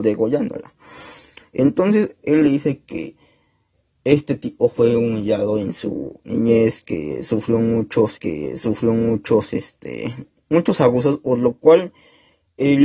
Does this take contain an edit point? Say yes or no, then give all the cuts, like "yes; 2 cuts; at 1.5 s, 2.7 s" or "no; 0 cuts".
yes; 1 cut; at 8.2 s